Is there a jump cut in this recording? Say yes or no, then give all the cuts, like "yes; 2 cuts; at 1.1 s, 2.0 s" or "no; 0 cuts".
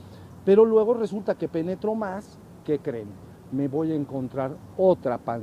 yes; 1 cut; at 2.6 s